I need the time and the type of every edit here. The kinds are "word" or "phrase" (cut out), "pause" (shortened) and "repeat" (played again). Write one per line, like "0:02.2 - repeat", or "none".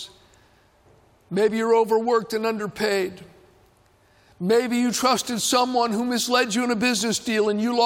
none